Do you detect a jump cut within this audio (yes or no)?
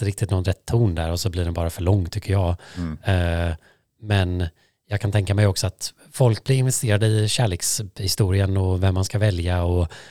no